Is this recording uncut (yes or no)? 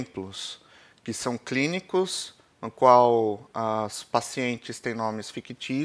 yes